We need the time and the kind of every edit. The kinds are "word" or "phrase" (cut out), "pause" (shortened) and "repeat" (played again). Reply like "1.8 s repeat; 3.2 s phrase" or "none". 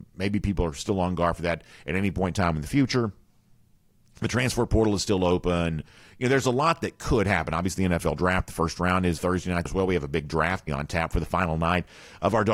9.2 s word; 9.7 s word; 10.7 s word